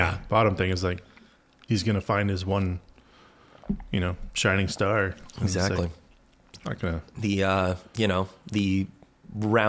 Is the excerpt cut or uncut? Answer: cut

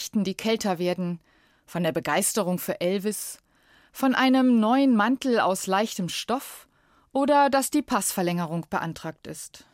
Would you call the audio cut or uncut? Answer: uncut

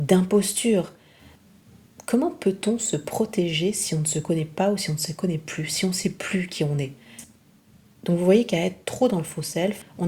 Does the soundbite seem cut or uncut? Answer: uncut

